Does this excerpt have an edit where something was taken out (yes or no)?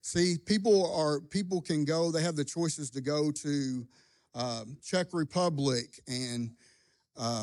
no